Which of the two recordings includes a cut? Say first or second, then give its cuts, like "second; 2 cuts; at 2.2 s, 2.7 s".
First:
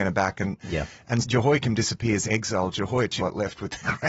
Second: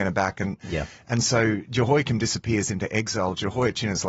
first; 3 cuts; at 1.2 s, 2.2 s, 3.2 s